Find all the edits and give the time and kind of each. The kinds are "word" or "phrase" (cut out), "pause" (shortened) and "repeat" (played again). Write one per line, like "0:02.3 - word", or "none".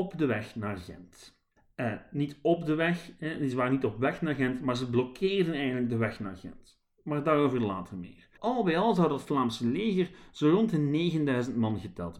0:01.6 - pause
0:08.4 - pause